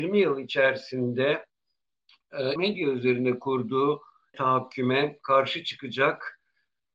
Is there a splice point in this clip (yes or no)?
yes